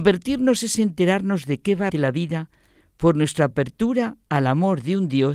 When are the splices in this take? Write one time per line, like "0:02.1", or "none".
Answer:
0:01.9